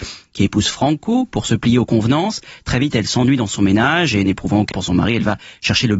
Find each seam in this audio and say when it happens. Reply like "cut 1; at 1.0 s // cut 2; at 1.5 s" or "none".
cut 1; at 4.7 s